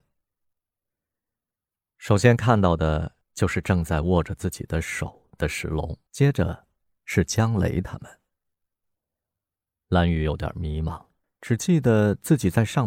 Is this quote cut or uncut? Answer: cut